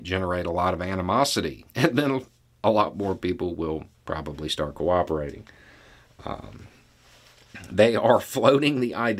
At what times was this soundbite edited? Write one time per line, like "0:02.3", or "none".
0:01.7
0:03.9